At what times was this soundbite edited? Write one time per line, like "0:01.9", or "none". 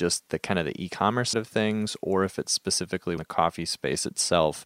0:01.3
0:03.2